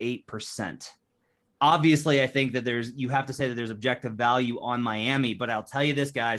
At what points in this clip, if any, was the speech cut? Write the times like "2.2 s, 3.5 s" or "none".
none